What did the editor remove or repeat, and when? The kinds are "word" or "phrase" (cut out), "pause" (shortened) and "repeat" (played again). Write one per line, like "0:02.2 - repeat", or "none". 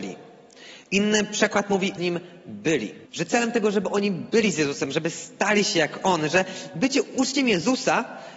0:02.0 - phrase
0:03.1 - pause